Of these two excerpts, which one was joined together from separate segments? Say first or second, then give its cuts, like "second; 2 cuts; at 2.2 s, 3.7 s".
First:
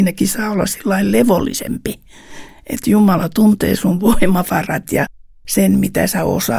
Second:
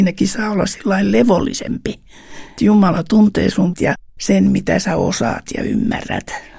second; 3 cuts; at 2.6 s, 3.7 s, 4.1 s